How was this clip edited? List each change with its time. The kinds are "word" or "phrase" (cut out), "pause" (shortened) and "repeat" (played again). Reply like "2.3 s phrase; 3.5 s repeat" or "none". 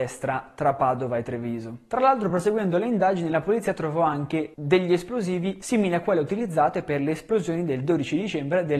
none